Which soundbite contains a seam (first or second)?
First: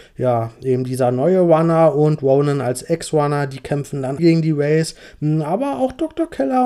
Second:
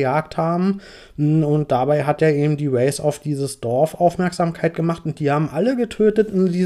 first